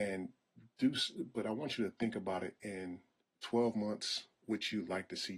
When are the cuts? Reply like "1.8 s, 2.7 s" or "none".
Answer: 3.2 s